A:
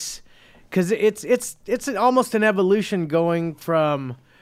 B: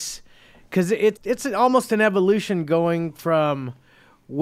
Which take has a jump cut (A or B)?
B